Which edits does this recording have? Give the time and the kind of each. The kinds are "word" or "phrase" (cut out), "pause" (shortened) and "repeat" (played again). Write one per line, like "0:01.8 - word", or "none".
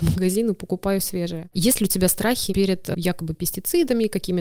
none